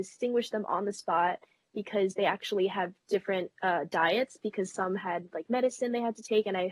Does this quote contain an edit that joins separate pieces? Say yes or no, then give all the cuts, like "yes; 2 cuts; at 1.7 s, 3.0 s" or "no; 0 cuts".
no; 0 cuts